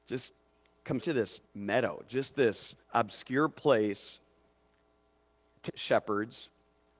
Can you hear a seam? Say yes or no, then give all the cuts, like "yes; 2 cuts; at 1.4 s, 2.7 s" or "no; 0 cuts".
yes; 4 cuts; at 1.0 s, 1.4 s, 2.8 s, 5.7 s